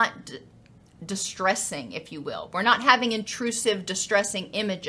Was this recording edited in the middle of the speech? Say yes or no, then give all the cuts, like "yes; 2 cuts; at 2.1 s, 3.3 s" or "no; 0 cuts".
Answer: no; 0 cuts